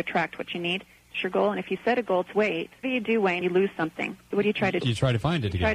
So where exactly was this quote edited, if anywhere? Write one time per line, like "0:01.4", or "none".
0:01.1
0:02.3
0:02.8
0:03.4
0:04.8